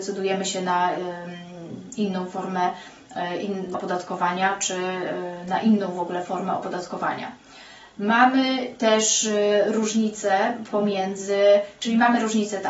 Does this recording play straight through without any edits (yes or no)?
no